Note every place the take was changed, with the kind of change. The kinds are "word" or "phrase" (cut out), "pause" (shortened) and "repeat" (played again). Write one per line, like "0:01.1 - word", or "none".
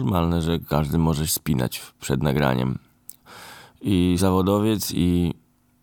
0:01.3 - word
0:04.2 - word